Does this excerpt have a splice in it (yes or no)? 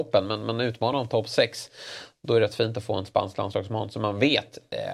no